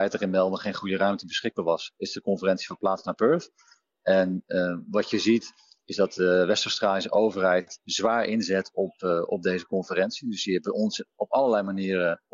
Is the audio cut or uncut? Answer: uncut